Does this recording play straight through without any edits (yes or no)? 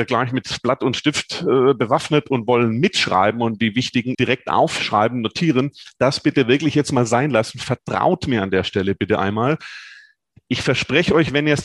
no